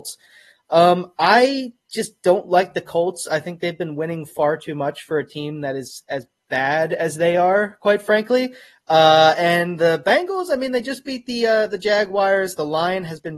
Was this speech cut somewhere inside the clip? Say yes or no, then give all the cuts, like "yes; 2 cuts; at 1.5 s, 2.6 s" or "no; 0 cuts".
no; 0 cuts